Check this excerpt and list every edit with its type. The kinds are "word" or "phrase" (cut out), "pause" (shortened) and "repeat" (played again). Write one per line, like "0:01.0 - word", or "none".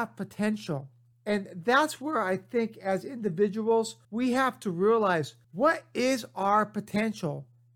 0:01.1 - pause
0:04.0 - pause
0:05.4 - pause